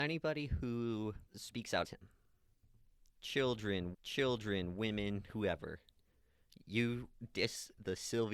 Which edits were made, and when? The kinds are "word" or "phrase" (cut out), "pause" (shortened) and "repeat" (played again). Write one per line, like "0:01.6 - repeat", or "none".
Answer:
0:01.3 - pause
0:01.8 - word
0:03.9 - repeat

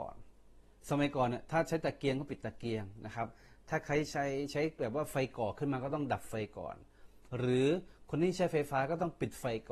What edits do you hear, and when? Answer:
none

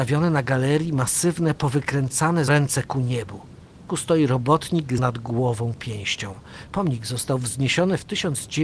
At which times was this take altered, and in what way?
0:02.5 - phrase
0:03.9 - word
0:05.0 - word

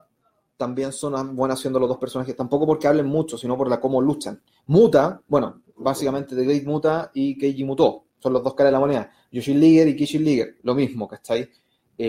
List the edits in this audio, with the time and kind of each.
0:04.5 - pause
0:05.7 - pause
0:08.1 - pause

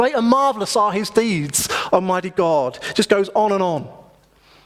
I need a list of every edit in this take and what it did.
none

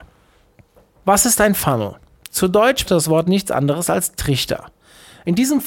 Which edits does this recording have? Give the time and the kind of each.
0:02.9 - word

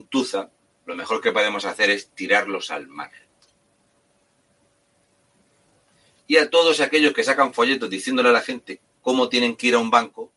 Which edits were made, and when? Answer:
none

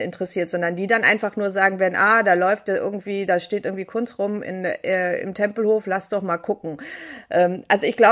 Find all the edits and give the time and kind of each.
none

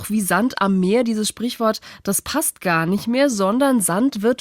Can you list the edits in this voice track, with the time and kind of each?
none

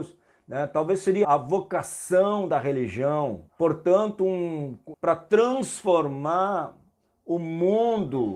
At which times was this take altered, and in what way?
0:01.2 - word
0:03.5 - pause
0:04.9 - word

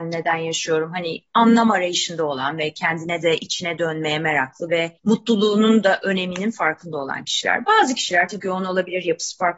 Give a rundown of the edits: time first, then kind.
0:05.0 - pause
0:08.4 - word

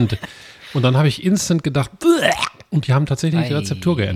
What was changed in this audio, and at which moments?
none

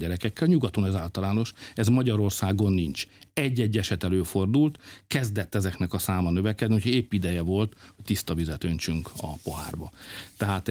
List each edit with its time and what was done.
none

